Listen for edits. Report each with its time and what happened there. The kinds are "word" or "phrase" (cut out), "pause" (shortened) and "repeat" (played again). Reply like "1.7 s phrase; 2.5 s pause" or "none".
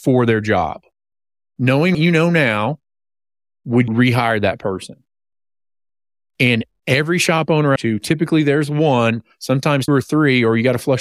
1.9 s word; 3.9 s word; 7.8 s phrase; 9.9 s word